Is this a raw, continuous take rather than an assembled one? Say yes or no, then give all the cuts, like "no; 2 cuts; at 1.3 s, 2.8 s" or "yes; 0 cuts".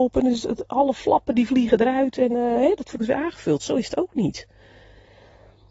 no; 1 cut; at 3.0 s